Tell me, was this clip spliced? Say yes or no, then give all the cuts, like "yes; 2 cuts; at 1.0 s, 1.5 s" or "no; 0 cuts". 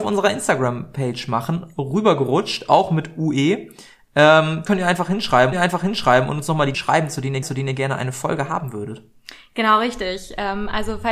yes; 4 cuts; at 4.7 s, 5.5 s, 6.7 s, 7.4 s